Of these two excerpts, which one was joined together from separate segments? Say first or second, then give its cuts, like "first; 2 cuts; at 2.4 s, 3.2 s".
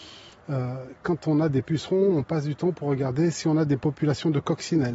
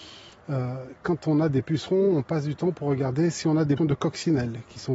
second; 1 cut; at 3.8 s